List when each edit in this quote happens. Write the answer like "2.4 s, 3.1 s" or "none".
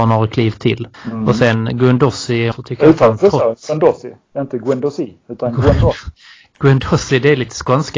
0.9 s, 2.5 s